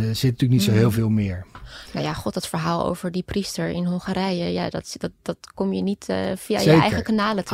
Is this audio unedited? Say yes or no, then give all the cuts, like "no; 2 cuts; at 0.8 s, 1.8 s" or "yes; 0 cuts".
yes; 0 cuts